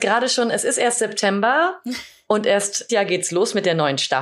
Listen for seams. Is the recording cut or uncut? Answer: cut